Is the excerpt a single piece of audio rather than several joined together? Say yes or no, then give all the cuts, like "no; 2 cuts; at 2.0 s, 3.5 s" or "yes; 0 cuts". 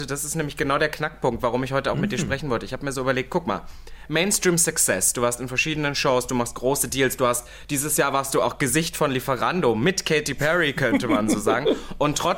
yes; 0 cuts